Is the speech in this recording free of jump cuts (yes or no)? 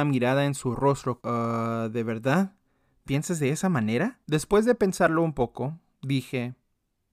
no